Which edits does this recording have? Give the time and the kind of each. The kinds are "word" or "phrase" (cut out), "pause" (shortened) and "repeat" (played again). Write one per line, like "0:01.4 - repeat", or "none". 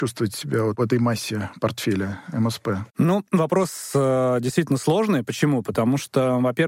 0:02.9 - pause